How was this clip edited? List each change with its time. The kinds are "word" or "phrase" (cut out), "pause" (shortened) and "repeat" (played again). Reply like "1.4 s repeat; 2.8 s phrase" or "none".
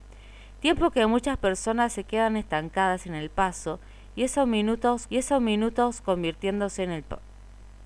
5.1 s repeat